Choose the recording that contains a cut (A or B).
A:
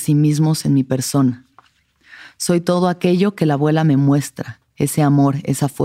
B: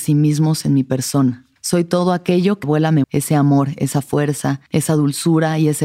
B